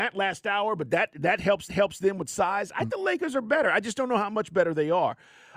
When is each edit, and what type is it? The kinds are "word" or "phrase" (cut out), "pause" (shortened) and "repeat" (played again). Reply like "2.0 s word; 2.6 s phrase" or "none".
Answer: 1.7 s repeat; 2.9 s word